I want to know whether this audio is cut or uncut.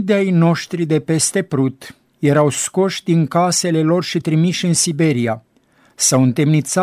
uncut